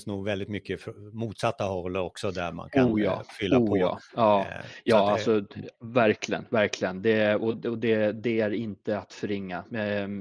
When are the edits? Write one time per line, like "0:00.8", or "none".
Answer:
none